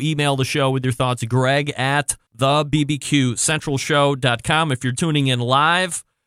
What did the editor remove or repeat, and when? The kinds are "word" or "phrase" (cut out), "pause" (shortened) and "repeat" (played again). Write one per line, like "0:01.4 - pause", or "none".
0:02.3 - pause
0:04.9 - word

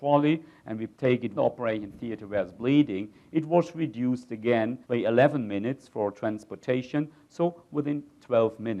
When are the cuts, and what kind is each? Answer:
0:00.9 - pause
0:01.4 - phrase
0:04.8 - pause

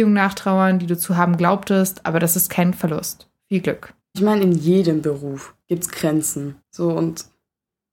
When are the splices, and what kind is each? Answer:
0:04.0 - pause
0:05.6 - pause
0:06.6 - pause

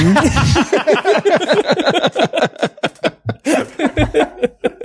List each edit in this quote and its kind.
none

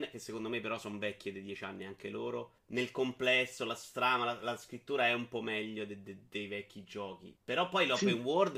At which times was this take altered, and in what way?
0:02.6 - pause
0:07.4 - pause

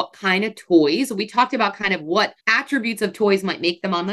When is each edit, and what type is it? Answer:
0:02.4 - pause

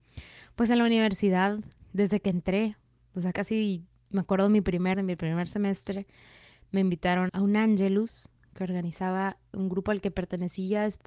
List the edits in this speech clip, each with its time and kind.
0:01.8 - word
0:03.3 - word
0:04.9 - word
0:07.3 - word
0:09.5 - word

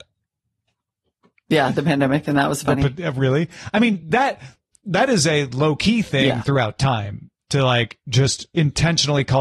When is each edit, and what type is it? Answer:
none

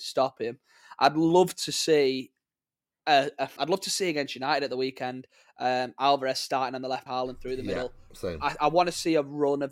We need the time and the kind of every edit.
0:03.6 - word
0:07.1 - phrase

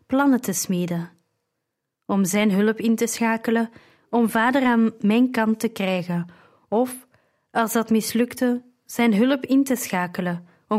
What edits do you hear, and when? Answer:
none

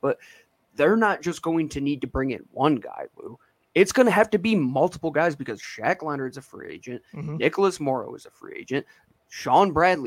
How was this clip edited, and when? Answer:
none

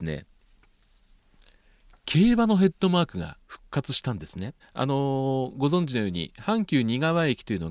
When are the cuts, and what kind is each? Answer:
0:03.4 - pause
0:04.6 - pause

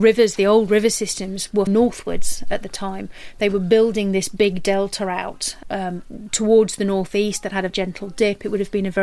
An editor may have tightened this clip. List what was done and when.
0:01.7 - word
0:05.6 - word
0:07.7 - word

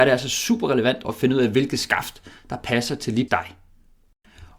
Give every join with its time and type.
0:01.0 - word
0:03.3 - word

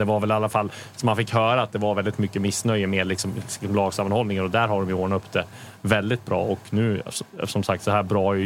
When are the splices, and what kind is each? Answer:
none

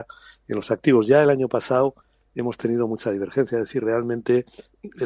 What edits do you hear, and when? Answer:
none

